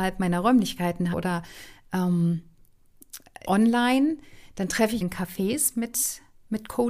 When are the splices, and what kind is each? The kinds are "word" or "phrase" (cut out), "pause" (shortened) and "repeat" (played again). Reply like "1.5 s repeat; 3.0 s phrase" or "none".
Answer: 1.1 s word; 3.4 s word; 5.0 s phrase